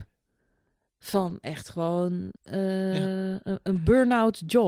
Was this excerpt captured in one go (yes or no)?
no